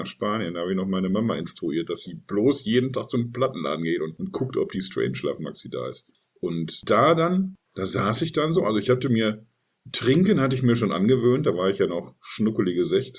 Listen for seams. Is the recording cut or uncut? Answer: uncut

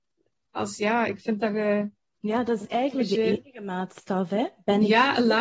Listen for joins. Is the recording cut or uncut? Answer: uncut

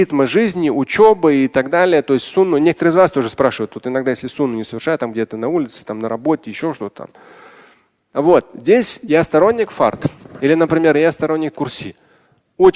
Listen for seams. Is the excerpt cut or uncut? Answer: cut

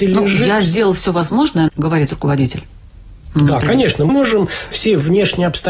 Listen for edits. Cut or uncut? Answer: cut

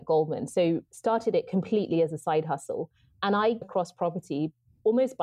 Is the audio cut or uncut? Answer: cut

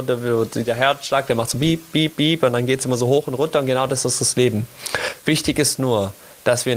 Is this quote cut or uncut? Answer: uncut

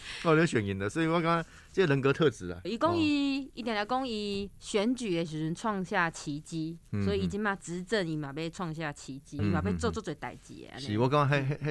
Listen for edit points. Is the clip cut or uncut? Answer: cut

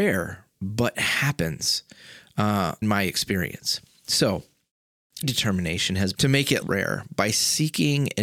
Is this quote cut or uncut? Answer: cut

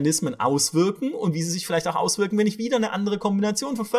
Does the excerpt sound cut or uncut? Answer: uncut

